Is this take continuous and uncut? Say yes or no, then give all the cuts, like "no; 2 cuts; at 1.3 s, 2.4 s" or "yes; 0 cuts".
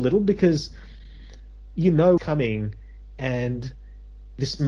no; 1 cut; at 2.2 s